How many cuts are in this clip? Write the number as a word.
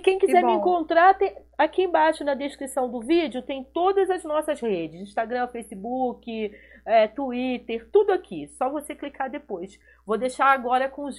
zero